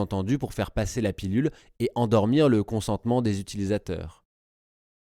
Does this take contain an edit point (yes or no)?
no